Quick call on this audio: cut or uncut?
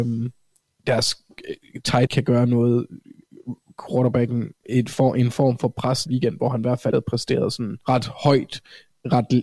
cut